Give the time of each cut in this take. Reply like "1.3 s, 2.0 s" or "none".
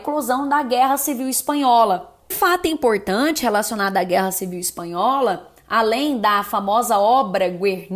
2.3 s